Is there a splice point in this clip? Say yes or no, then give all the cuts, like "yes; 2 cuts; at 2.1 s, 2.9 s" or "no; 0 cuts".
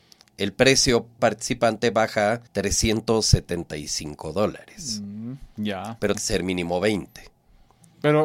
yes; 3 cuts; at 1.2 s, 2.5 s, 6.1 s